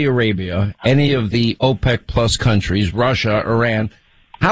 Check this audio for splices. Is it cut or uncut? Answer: uncut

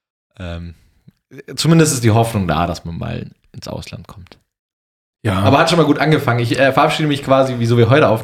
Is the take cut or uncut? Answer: uncut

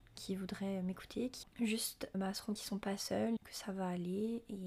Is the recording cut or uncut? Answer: cut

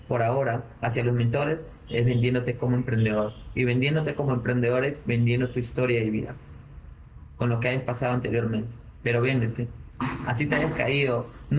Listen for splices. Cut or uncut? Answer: uncut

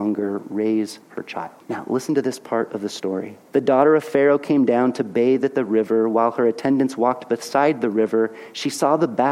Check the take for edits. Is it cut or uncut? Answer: cut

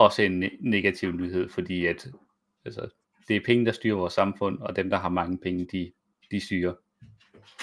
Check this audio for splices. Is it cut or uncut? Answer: uncut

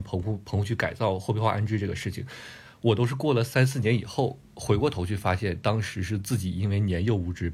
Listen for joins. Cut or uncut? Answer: uncut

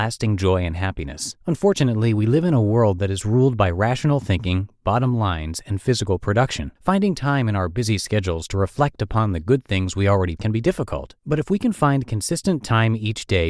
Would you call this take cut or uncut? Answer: cut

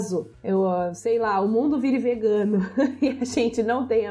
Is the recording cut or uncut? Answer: uncut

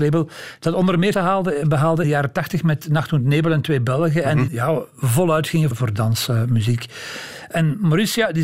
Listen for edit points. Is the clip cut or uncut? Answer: cut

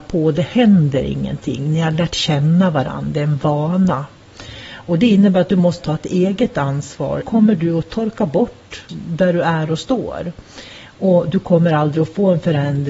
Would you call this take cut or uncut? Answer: cut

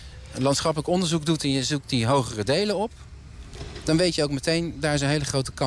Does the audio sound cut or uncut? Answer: uncut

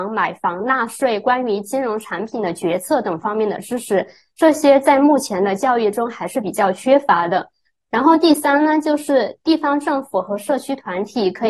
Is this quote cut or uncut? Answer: uncut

